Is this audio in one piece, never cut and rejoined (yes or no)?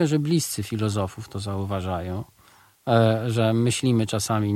yes